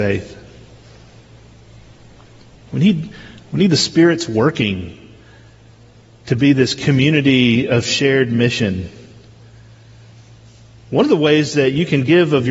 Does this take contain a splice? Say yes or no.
no